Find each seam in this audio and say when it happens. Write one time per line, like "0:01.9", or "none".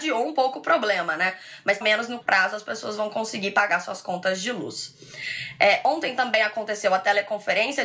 0:01.8
0:02.2